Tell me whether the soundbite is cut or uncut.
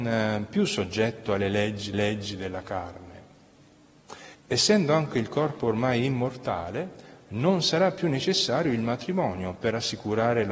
cut